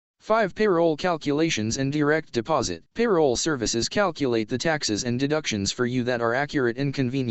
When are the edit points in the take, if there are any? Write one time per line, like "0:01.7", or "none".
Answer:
0:02.9